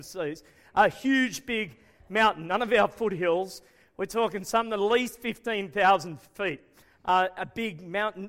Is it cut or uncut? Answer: uncut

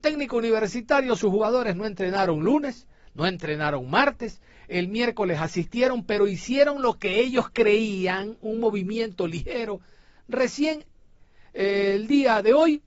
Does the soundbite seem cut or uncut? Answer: uncut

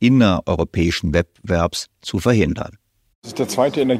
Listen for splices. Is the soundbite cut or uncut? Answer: uncut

